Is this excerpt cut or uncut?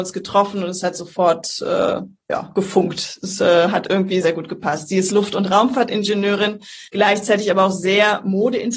cut